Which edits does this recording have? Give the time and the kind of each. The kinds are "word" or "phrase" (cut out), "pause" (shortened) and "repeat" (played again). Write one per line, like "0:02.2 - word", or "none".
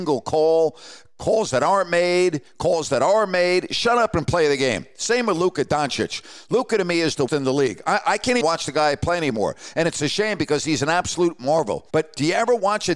0:07.3 - word
0:08.4 - word
0:11.9 - pause